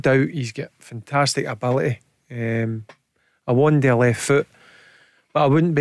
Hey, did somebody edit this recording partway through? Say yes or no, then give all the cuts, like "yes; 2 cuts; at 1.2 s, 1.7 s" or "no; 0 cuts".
no; 0 cuts